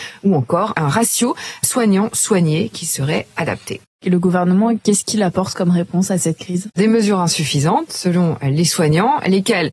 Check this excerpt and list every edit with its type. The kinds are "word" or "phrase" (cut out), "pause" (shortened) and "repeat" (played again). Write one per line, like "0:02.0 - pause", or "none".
0:06.7 - word

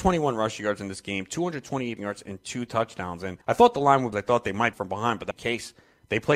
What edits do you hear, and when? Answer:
0:02.0 - word
0:03.4 - pause
0:04.1 - phrase
0:04.7 - phrase
0:05.3 - word

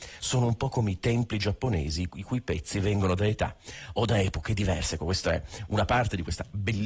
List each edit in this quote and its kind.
none

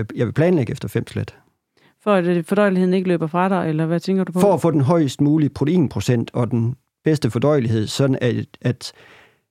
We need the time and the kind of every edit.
none

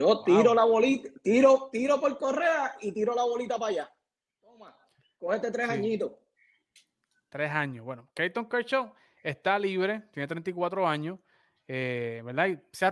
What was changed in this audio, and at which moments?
none

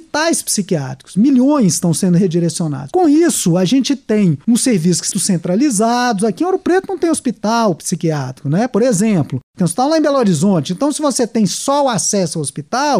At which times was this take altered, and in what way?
0:05.1 - word

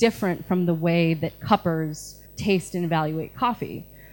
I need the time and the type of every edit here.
0:02.3 - pause

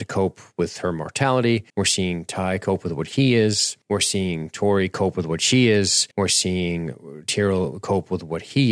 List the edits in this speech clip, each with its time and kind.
0:01.7 - pause
0:03.8 - pause
0:06.1 - pause

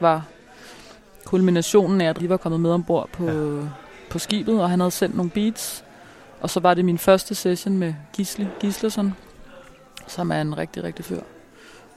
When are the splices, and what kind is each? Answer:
0:02.2 - phrase
0:11.1 - word

